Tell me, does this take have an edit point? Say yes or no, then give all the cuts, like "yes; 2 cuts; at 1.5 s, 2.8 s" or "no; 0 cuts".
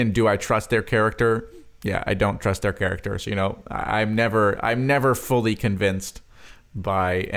no; 0 cuts